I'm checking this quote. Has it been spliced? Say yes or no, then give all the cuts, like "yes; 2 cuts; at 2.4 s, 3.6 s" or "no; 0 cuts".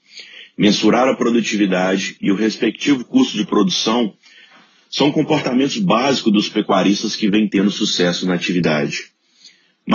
no; 0 cuts